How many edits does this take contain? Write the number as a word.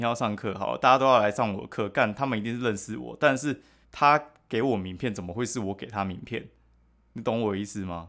one